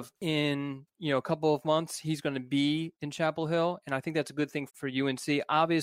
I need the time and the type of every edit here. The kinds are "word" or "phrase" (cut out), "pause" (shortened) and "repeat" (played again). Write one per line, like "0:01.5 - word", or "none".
0:04.7 - word

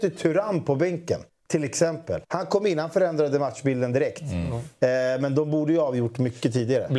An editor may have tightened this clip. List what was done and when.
0:01.3 - pause
0:02.2 - pause

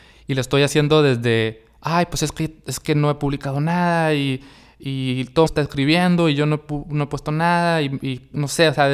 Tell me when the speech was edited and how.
0:05.5 - phrase

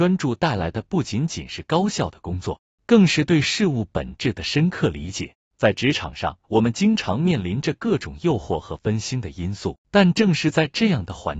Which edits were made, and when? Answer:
0:05.5 - pause
0:06.4 - pause
0:09.8 - pause

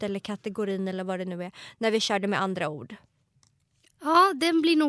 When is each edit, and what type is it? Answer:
none

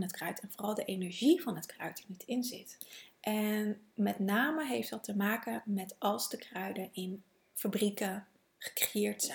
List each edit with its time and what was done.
none

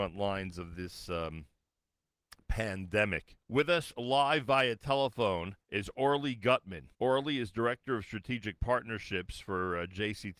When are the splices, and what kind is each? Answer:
0:03.4 - pause
0:05.6 - pause
0:06.9 - pause

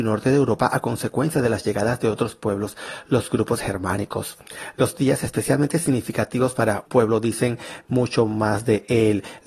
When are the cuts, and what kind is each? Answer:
0:06.9 - word

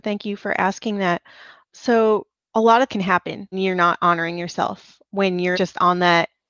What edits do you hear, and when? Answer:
0:02.4 - pause
0:02.9 - word
0:03.5 - word
0:05.1 - word
0:05.5 - word

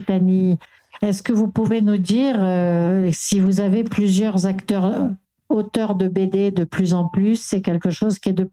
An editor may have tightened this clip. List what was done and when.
none

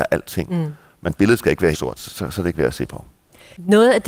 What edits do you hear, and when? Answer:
0:01.7 - word
0:02.1 - word

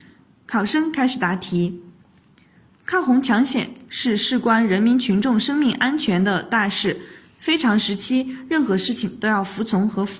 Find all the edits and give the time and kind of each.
none

